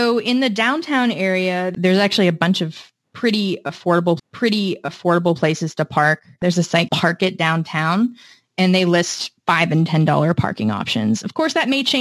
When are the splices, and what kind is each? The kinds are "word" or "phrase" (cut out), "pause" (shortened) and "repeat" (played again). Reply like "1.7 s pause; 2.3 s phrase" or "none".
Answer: 4.2 s repeat; 6.9 s word; 9.4 s pause